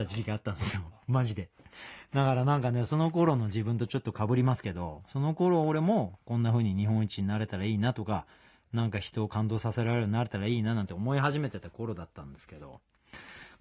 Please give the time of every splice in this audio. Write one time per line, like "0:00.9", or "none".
none